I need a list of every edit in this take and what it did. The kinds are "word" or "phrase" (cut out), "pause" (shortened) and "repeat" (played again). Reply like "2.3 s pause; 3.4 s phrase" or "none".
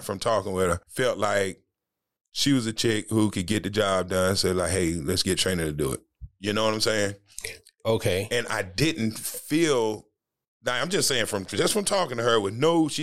none